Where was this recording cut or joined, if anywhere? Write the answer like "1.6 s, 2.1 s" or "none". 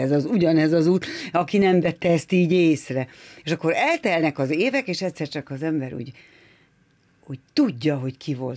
none